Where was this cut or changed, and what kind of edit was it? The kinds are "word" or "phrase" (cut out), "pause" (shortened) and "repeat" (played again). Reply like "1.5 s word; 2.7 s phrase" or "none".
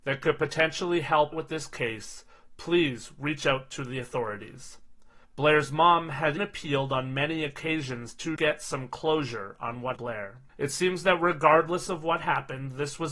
1.3 s word; 5.2 s pause; 6.4 s word; 8.4 s word; 10.0 s phrase; 10.5 s pause